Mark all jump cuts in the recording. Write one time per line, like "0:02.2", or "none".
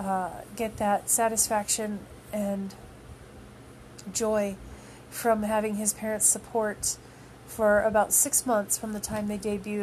none